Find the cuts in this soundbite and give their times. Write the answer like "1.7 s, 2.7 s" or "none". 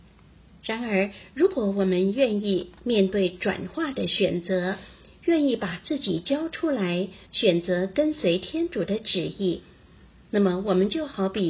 7.3 s